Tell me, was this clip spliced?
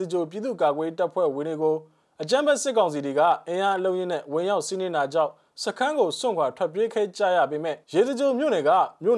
yes; 1 cut; at 7.8 s

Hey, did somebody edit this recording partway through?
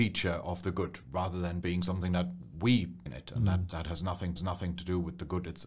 yes; 3 cuts; at 1.6 s, 3.1 s, 4.4 s

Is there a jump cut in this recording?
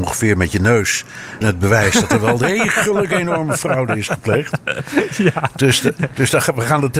yes; 1 cut; at 1.4 s

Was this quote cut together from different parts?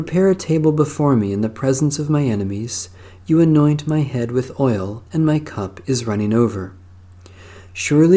yes; 1 cut; at 5.1 s

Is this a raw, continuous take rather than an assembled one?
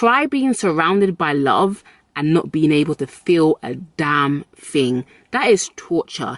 yes; 0 cuts

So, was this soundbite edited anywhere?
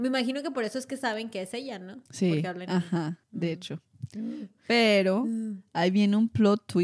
yes; 1 cut; at 2.1 s

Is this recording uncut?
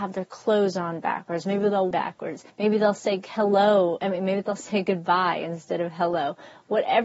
no; 2 cuts; at 1.9 s, 2.5 s

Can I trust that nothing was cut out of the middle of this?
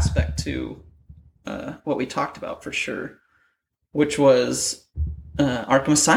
yes; 0 cuts

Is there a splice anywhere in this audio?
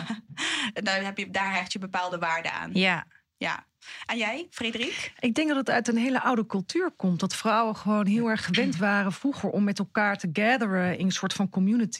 no; 0 cuts

